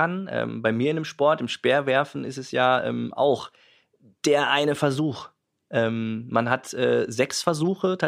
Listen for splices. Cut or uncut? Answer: uncut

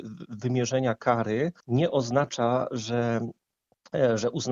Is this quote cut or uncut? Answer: cut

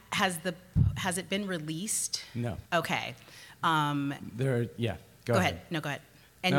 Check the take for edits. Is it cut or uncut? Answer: cut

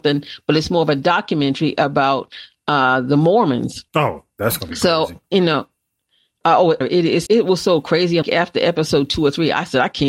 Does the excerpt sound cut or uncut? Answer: cut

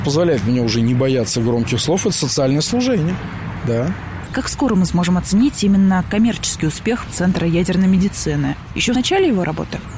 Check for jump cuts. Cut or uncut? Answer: cut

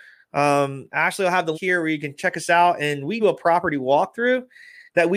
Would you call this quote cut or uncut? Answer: cut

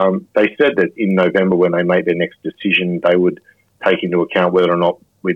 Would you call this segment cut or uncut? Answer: uncut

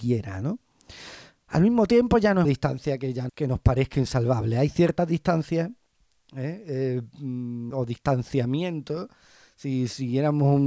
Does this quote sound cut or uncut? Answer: cut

